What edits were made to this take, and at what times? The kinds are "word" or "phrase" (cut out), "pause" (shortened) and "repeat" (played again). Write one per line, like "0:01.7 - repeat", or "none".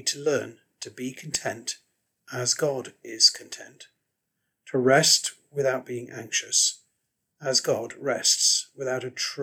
none